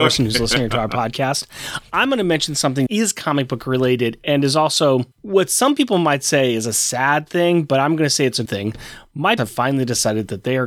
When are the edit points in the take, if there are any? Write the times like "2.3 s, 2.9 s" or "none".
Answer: 2.9 s, 5.1 s, 8.5 s, 9.4 s